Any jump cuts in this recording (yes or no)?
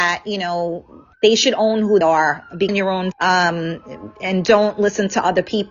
yes